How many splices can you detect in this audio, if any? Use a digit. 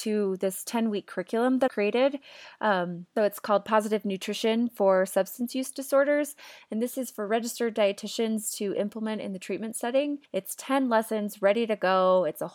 3